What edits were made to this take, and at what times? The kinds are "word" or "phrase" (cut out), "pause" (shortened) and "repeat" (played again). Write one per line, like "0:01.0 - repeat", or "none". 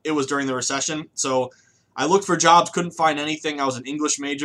none